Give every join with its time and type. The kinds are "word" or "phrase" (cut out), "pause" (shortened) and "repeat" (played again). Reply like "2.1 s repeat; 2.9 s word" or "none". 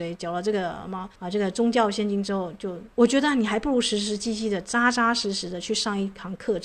1.2 s pause; 2.9 s pause